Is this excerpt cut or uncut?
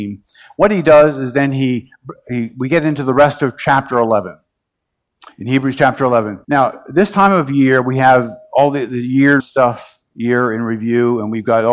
cut